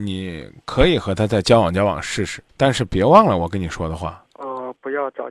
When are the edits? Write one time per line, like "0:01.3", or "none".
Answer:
0:02.5
0:04.3